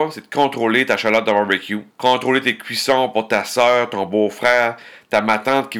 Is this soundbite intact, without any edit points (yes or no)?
no